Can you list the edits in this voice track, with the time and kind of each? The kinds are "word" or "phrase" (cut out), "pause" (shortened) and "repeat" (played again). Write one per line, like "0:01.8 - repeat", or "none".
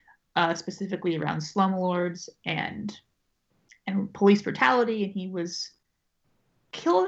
none